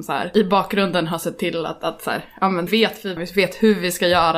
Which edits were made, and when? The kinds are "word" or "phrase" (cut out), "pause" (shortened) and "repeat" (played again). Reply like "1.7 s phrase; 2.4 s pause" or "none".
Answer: 2.7 s word; 3.2 s phrase